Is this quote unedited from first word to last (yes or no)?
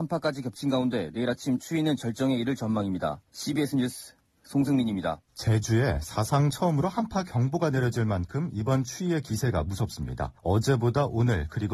no